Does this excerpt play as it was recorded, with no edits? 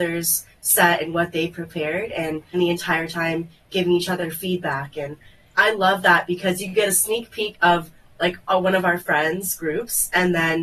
no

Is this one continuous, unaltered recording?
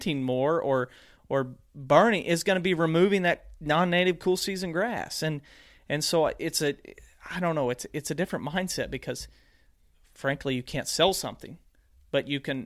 yes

